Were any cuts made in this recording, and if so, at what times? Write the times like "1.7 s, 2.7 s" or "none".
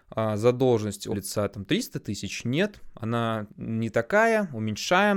1.1 s, 3.5 s